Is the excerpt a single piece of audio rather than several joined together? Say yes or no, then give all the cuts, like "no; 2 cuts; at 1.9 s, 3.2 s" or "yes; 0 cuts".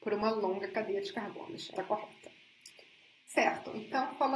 no; 1 cut; at 1.8 s